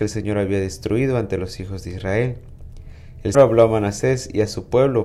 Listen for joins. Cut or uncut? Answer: cut